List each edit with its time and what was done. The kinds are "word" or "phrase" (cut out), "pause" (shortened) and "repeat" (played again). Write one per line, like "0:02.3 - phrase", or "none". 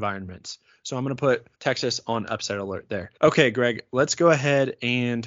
0:01.5 - pause
0:03.2 - pause